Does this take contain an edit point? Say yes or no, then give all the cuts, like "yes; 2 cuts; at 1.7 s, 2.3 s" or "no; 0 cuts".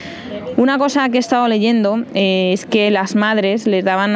no; 0 cuts